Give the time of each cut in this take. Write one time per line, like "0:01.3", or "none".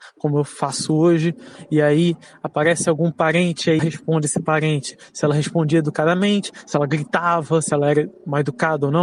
0:03.8